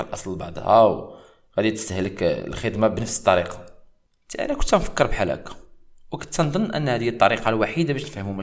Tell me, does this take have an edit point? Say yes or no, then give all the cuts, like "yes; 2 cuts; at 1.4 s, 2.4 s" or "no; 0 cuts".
no; 0 cuts